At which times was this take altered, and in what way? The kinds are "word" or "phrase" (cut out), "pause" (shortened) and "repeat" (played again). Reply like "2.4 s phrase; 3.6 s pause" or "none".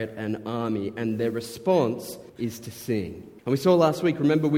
2.3 s pause; 3.4 s pause